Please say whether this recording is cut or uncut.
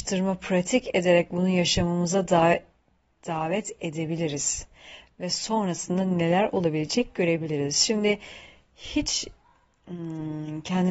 uncut